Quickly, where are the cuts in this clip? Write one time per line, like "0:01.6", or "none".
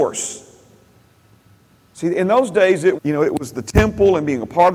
0:03.0